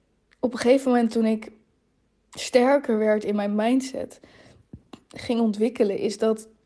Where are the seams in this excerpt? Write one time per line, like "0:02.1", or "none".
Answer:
none